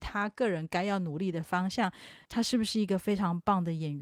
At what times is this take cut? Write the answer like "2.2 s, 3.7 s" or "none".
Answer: 2.2 s